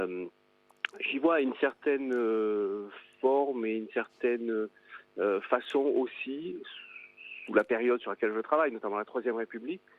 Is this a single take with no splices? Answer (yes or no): yes